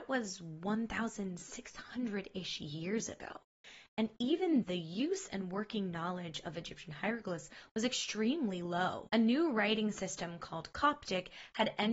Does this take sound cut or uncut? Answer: cut